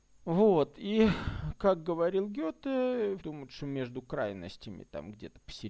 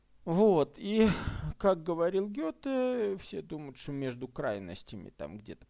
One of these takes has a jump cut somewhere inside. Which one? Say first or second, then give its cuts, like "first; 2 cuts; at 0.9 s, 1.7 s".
first; 1 cut; at 3.2 s